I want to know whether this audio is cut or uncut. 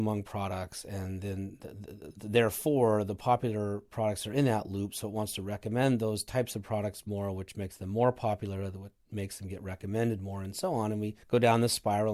cut